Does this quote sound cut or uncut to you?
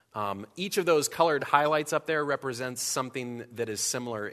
uncut